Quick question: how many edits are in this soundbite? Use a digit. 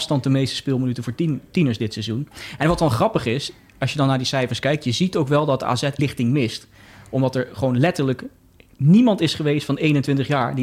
1